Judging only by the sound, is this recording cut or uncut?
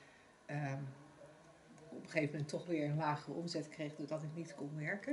uncut